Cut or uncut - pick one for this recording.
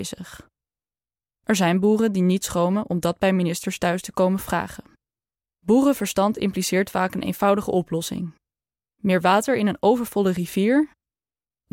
cut